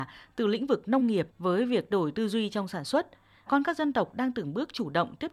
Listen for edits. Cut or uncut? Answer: cut